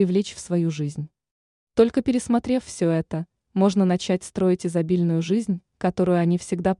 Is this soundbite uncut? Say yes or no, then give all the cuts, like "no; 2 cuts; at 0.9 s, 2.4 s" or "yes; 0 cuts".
yes; 0 cuts